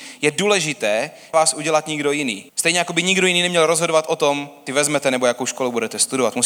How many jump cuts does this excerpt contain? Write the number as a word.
three